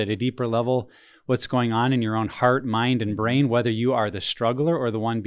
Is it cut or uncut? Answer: uncut